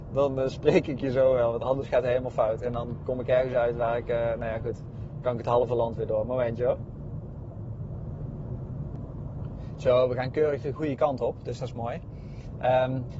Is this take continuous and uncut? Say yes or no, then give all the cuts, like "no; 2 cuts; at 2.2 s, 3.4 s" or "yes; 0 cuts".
yes; 0 cuts